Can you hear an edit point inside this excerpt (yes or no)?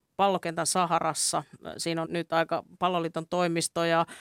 yes